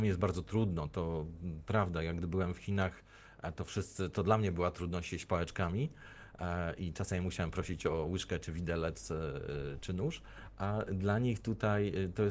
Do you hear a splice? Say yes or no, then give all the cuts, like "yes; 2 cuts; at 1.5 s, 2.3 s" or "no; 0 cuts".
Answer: no; 0 cuts